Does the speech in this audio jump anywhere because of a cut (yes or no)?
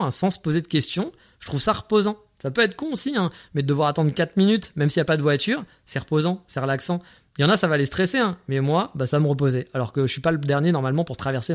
no